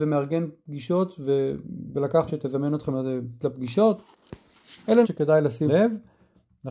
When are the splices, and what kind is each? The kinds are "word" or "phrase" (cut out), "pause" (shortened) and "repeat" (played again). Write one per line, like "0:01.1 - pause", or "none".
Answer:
0:02.3 - word
0:03.4 - word
0:05.0 - word
0:05.7 - word